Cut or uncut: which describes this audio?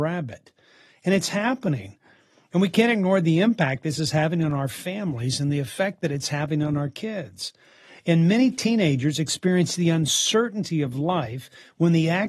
uncut